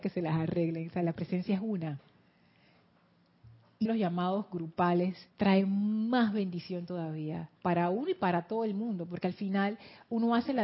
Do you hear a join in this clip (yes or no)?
yes